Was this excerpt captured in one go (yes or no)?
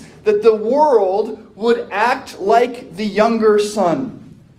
yes